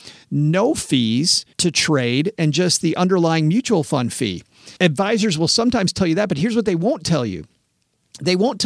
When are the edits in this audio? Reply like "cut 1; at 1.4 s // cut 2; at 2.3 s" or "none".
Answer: cut 1; at 1.5 s // cut 2; at 4.8 s